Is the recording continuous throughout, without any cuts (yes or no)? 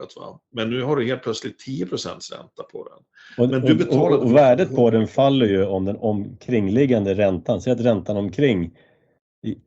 yes